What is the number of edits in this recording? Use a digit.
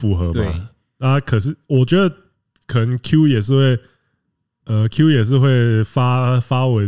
0